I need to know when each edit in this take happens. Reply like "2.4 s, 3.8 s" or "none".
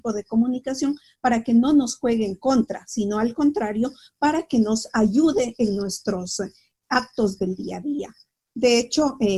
none